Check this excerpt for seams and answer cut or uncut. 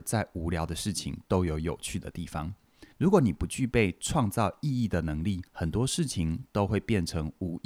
cut